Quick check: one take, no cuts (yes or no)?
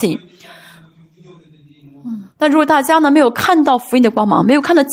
no